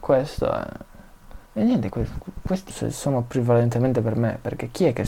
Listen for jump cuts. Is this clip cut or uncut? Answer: cut